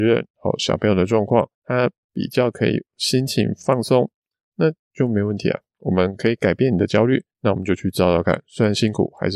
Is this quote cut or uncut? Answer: cut